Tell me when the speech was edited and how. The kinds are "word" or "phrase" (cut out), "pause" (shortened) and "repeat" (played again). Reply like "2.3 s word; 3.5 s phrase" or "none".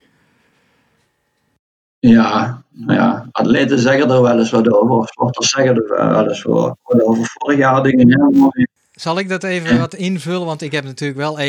none